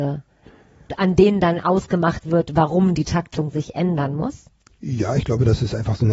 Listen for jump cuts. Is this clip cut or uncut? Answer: uncut